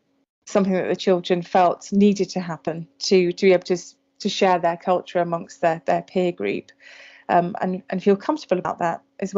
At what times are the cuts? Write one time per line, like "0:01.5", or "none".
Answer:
none